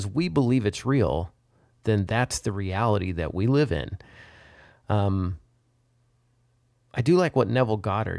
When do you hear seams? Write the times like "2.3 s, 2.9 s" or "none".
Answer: none

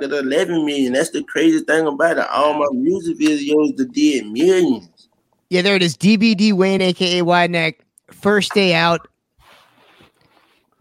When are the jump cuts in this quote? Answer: none

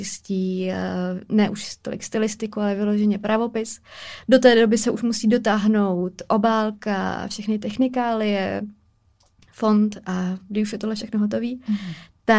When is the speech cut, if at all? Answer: none

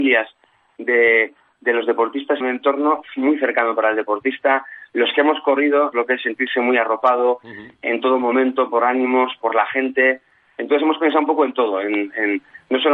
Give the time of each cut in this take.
2.4 s, 5.9 s, 9.4 s

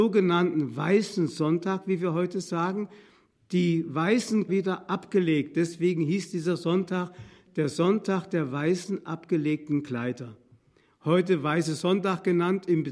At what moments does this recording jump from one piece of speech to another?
4.5 s

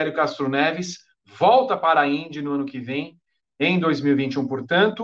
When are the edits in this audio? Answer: none

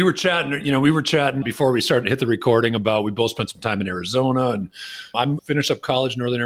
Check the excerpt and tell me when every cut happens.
1.4 s, 5.4 s

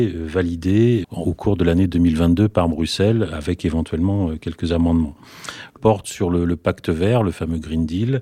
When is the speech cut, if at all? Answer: 1.0 s, 5.8 s

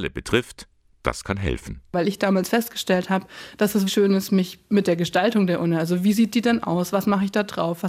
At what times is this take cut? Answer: 3.9 s

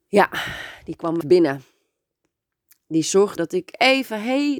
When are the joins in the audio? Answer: 1.2 s, 3.4 s

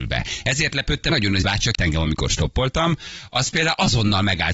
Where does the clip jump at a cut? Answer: 1.1 s, 1.4 s, 1.7 s

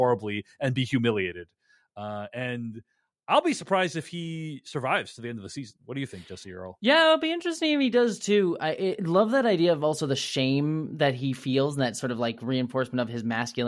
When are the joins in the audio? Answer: none

